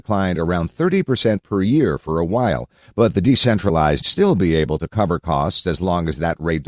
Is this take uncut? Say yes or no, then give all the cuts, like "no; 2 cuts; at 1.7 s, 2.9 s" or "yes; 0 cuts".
no; 1 cut; at 4.0 s